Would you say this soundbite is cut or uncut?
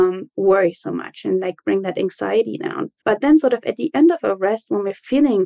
cut